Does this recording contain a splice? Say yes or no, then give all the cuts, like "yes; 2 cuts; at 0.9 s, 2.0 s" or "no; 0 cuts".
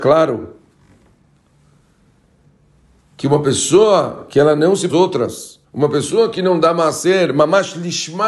yes; 2 cuts; at 4.9 s, 5.6 s